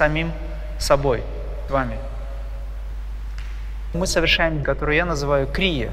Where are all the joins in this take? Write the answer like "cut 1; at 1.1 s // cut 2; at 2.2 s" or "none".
cut 1; at 1.7 s // cut 2; at 3.9 s // cut 3; at 4.6 s